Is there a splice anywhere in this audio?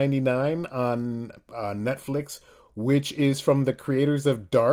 no; 0 cuts

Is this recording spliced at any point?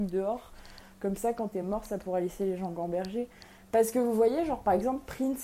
no; 0 cuts

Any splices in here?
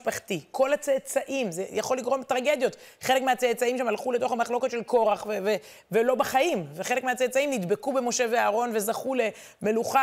no; 0 cuts

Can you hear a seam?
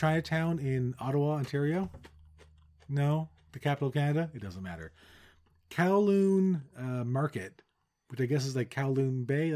no; 0 cuts

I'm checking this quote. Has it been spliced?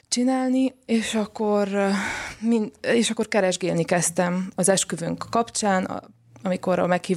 no; 0 cuts

